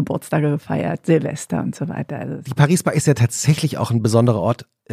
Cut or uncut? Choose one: uncut